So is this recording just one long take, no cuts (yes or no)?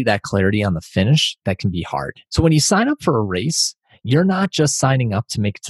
no